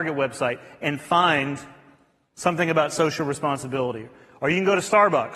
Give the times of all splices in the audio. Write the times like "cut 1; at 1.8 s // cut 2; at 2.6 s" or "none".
none